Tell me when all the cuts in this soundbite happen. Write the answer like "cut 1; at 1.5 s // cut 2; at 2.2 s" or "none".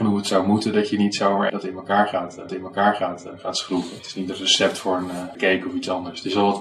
cut 1; at 1.5 s // cut 2; at 2.5 s // cut 3; at 5.3 s